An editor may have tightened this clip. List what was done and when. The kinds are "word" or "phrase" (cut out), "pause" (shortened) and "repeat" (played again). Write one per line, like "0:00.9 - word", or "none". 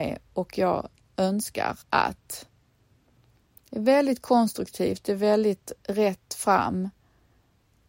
0:01.8 - pause
0:05.8 - pause